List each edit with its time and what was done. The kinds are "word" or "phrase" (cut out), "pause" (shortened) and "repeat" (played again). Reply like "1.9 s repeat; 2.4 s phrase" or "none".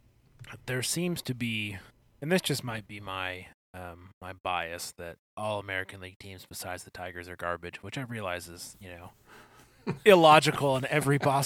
2.0 s pause; 4.2 s pause; 5.3 s pause